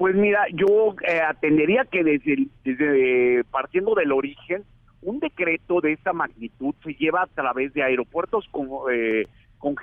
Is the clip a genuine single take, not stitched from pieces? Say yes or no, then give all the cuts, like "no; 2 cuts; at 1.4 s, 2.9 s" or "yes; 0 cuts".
yes; 0 cuts